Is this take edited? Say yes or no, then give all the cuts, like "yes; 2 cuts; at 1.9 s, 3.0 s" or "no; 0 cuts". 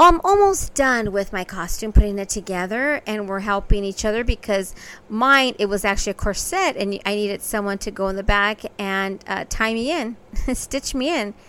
no; 0 cuts